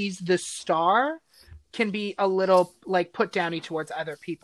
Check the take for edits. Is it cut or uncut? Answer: uncut